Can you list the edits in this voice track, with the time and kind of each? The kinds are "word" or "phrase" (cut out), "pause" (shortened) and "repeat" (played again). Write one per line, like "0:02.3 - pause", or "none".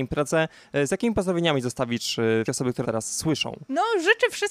0:02.4 - word
0:02.8 - word